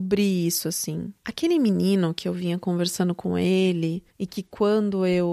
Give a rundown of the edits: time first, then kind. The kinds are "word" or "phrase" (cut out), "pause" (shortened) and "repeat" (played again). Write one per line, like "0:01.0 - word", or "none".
0:01.2 - pause
0:04.1 - pause